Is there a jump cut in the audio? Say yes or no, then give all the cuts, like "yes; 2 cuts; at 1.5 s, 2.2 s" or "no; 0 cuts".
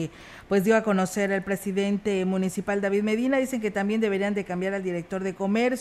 no; 0 cuts